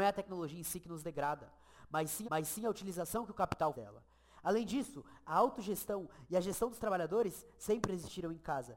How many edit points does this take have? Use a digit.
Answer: 2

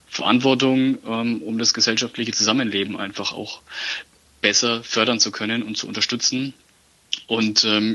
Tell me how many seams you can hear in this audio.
0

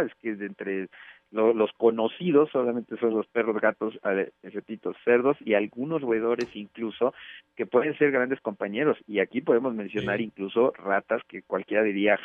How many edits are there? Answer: 0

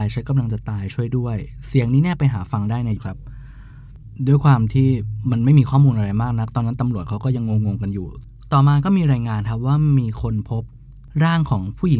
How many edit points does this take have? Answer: 1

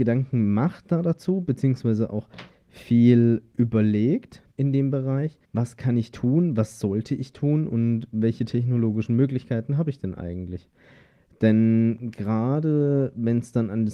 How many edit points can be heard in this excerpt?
2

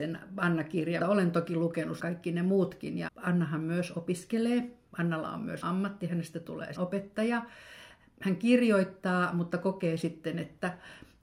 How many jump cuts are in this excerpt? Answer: 6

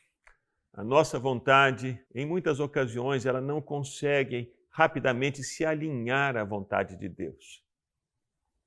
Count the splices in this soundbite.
1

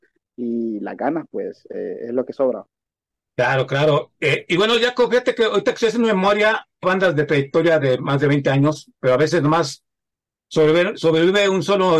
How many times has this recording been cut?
1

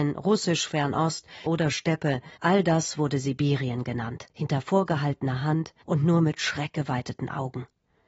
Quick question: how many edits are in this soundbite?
4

